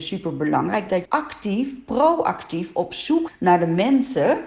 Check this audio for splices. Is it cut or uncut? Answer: cut